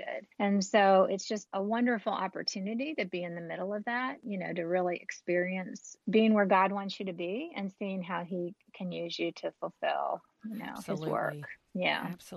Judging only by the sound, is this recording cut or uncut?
uncut